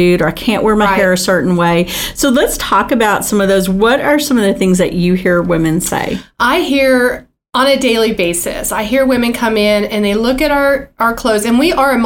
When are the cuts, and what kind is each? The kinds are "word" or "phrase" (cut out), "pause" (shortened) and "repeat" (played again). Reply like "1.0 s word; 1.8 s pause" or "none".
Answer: none